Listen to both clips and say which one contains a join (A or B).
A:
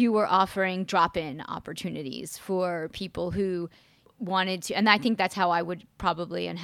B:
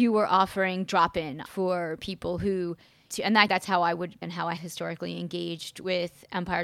B